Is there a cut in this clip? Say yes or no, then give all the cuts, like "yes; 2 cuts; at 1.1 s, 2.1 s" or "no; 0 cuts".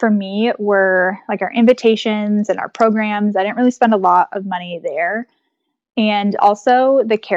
no; 0 cuts